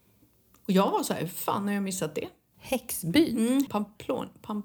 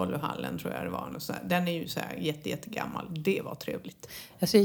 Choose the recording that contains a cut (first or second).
first